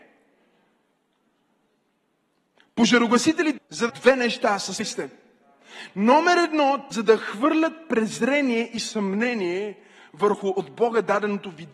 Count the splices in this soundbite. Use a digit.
4